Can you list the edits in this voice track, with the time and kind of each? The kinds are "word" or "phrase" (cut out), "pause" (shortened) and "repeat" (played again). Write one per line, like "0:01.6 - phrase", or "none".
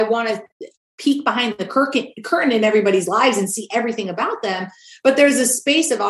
none